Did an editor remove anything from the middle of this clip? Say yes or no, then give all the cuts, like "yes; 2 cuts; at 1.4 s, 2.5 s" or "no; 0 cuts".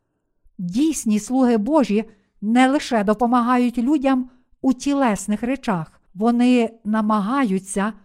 yes; 1 cut; at 6.1 s